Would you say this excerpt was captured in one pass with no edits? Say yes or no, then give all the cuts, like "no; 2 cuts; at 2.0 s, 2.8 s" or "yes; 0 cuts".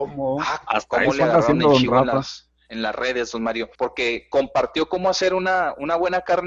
no; 1 cut; at 3.7 s